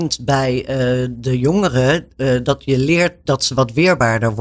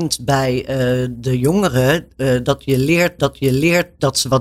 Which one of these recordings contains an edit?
second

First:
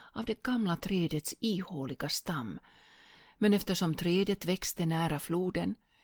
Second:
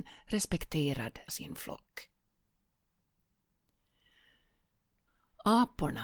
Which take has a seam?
second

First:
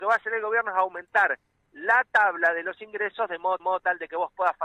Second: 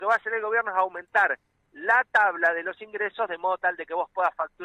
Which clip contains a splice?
first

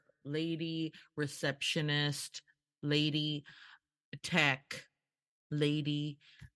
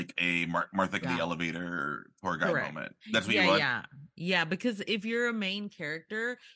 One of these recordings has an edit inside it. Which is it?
second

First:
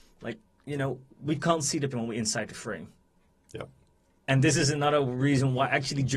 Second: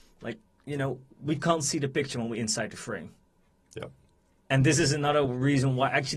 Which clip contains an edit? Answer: first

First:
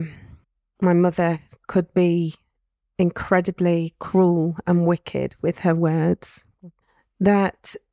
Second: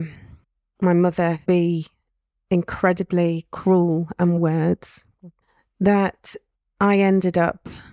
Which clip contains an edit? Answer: second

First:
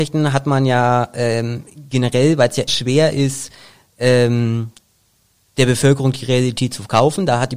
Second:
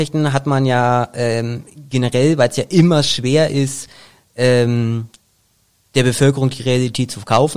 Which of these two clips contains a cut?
first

